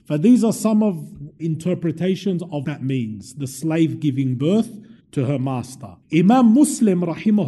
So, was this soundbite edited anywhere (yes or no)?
yes